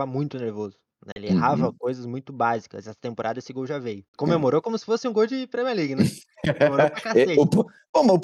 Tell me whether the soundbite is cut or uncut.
cut